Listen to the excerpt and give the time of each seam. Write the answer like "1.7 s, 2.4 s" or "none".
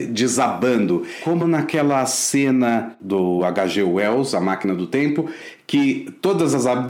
none